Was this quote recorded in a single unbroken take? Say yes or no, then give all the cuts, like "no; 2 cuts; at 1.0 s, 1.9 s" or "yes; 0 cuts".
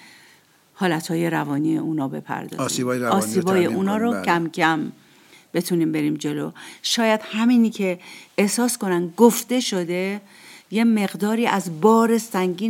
yes; 0 cuts